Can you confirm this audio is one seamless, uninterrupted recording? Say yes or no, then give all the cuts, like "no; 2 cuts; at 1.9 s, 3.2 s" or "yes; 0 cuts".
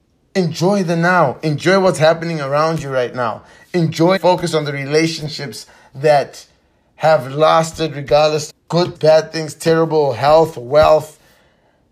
no; 3 cuts; at 4.2 s, 8.5 s, 8.9 s